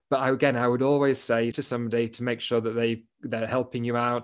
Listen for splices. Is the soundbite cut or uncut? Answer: cut